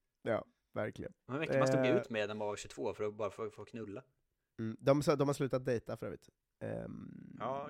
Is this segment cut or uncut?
uncut